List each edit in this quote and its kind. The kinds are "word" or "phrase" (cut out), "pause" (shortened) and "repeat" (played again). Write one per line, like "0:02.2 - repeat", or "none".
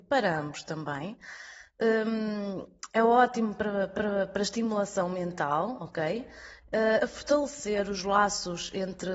0:02.9 - pause
0:04.0 - repeat
0:07.0 - word